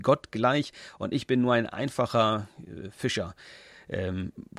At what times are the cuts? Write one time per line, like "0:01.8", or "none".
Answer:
none